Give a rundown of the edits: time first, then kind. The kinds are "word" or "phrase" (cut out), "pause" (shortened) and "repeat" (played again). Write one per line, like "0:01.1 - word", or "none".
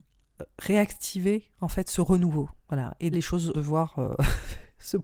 0:02.6 - pause
0:03.1 - phrase
0:03.5 - word